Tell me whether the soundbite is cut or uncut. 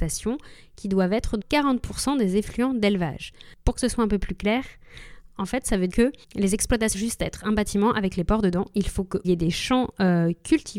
cut